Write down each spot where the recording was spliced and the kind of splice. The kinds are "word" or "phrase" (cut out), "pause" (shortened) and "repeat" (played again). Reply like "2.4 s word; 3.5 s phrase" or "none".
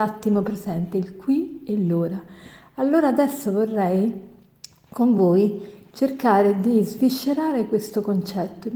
none